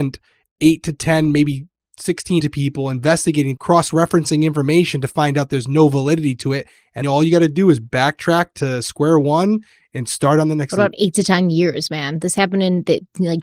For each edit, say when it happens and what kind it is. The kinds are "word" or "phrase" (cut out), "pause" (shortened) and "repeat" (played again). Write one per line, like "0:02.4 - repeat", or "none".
0:02.4 - phrase
0:03.6 - word
0:07.0 - word